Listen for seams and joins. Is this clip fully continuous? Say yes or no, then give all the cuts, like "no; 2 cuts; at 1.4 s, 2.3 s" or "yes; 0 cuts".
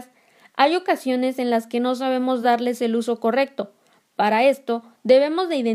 yes; 0 cuts